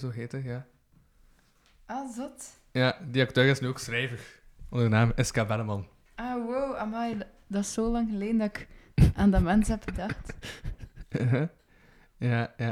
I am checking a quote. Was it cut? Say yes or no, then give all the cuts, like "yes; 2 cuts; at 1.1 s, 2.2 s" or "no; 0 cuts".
no; 0 cuts